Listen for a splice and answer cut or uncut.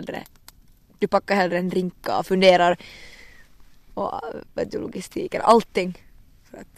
uncut